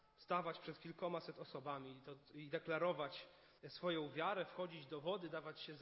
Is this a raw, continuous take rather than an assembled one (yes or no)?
no